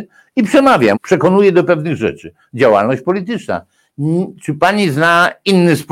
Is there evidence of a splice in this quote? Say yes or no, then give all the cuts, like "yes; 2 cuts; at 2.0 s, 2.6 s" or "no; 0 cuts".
yes; 1 cut; at 0.9 s